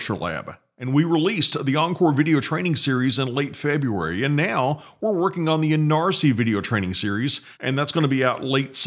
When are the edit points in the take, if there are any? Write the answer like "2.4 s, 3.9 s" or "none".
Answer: 7.5 s

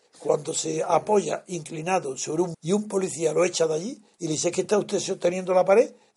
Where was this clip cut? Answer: 2.5 s

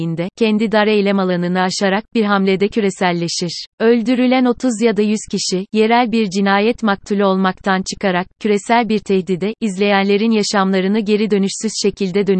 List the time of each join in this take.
3.7 s

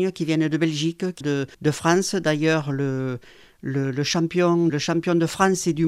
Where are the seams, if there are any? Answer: 1.2 s, 1.5 s, 4.7 s

